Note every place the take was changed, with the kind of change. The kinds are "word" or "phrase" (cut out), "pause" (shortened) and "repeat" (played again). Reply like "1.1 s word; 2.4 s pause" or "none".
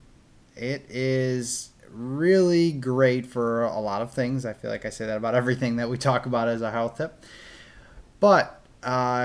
none